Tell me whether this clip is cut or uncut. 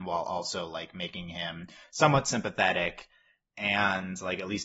uncut